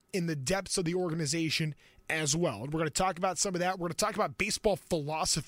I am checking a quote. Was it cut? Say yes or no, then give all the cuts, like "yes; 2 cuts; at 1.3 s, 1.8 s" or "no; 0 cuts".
no; 0 cuts